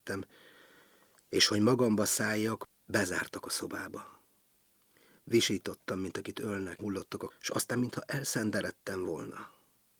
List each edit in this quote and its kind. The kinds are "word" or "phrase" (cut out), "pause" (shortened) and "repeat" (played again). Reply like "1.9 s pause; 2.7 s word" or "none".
6.8 s phrase; 7.3 s word